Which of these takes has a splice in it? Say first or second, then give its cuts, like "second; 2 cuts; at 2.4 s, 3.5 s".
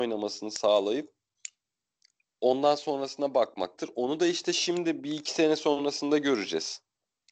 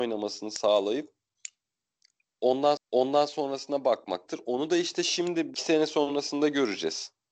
second; 2 cuts; at 2.8 s, 5.5 s